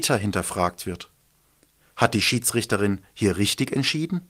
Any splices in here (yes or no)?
no